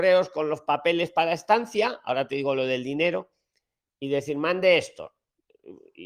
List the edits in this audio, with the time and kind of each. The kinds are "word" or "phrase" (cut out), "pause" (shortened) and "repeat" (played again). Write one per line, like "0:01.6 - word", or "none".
none